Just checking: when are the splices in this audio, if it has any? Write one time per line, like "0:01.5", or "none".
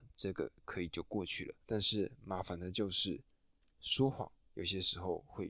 0:01.6
0:04.4